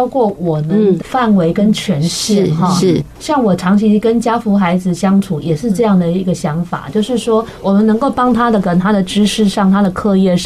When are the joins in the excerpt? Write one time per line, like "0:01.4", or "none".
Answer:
0:01.0